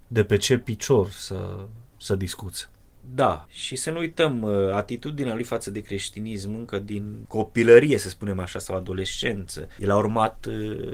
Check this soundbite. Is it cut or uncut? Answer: uncut